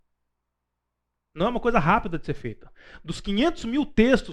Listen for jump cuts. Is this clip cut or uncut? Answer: uncut